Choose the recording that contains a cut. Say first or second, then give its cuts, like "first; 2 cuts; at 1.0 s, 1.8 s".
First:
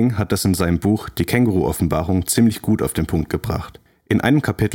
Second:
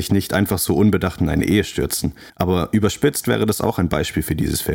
second; 1 cut; at 2.3 s